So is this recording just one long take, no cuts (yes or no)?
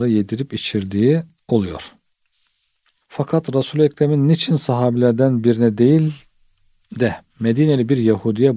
yes